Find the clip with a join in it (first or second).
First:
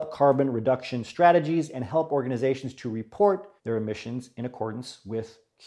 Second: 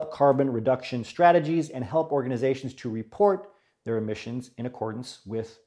first